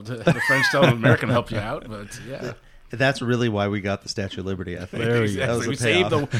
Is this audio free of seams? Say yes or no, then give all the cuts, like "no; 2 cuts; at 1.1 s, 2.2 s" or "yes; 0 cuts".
yes; 0 cuts